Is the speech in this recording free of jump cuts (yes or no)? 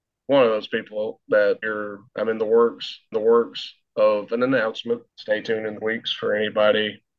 no